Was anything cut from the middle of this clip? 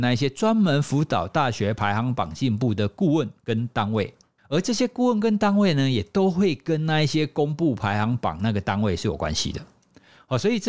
no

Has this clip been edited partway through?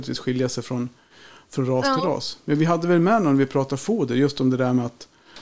no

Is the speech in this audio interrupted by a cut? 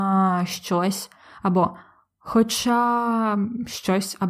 no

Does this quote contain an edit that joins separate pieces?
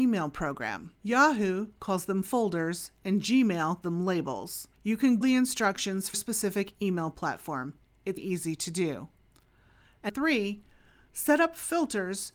yes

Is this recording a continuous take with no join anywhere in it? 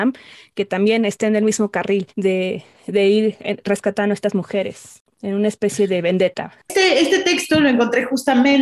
no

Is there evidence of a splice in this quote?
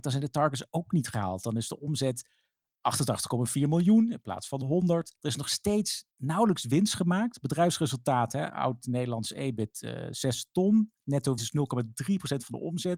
yes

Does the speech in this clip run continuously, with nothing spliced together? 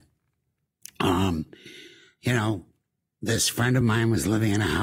yes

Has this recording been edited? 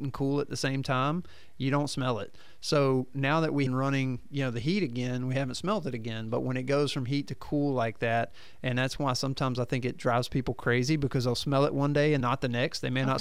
yes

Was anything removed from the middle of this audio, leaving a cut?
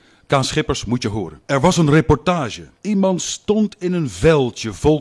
yes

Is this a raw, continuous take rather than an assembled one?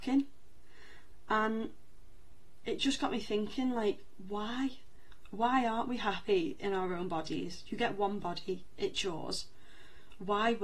yes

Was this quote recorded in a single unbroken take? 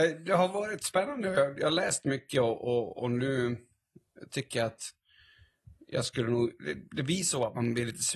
yes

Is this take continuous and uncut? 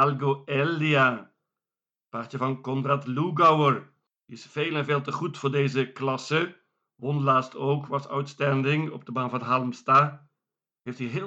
yes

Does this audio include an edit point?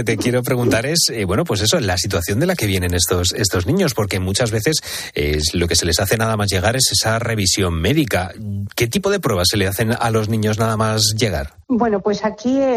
yes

